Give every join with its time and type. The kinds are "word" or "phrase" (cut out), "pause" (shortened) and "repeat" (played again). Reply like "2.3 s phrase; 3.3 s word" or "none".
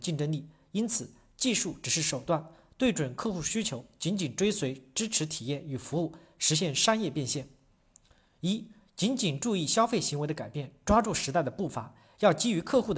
none

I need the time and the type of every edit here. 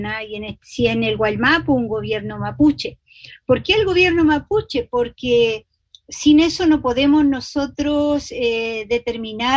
none

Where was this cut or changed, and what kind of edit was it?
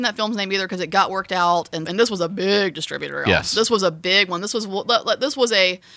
1.9 s word

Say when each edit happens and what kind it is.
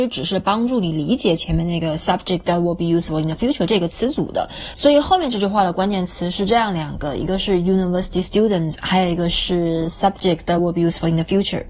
none

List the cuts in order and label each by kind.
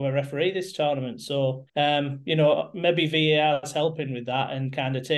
1.7 s pause

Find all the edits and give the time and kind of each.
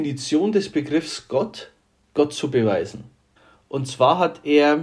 none

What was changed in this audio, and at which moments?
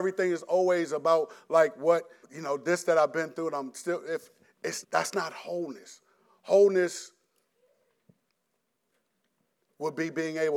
2.2 s word; 4.8 s word

